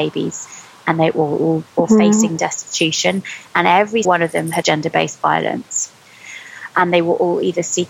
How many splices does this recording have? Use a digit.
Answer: 3